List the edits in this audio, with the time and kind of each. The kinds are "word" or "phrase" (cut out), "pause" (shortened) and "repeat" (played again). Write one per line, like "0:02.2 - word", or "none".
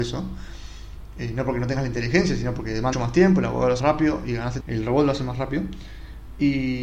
0:02.9 - word
0:03.8 - word
0:04.6 - word